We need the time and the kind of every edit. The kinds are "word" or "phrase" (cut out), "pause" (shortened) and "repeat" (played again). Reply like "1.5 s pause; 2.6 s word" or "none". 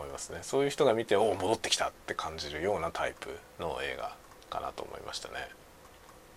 4.4 s pause